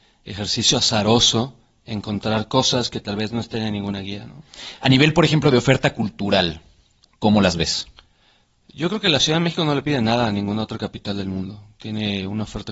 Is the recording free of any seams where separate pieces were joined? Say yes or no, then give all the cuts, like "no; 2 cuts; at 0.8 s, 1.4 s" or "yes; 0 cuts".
yes; 0 cuts